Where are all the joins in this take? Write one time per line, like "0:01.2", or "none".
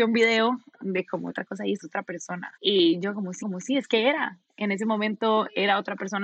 0:01.3
0:01.8
0:02.6
0:03.4